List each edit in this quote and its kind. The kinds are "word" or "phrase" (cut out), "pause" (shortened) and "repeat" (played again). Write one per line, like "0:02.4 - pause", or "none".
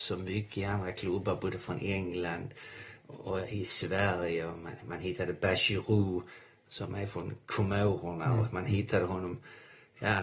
none